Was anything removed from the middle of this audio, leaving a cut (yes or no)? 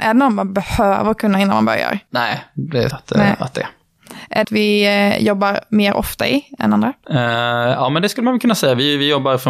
yes